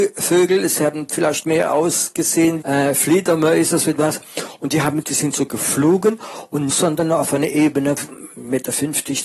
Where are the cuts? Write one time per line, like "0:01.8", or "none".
0:02.6
0:05.0
0:06.7